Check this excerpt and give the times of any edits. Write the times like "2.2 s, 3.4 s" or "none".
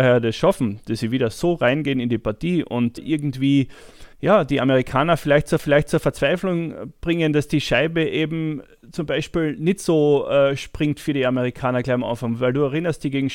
3.0 s, 4.1 s, 5.6 s